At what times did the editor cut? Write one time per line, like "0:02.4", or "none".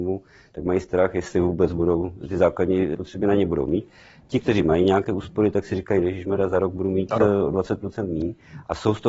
0:02.9